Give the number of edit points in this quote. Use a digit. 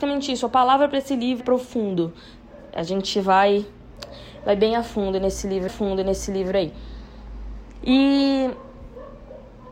2